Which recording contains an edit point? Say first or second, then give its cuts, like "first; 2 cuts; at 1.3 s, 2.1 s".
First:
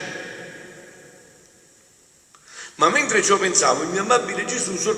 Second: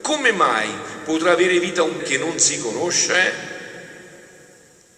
second; 1 cut; at 2.0 s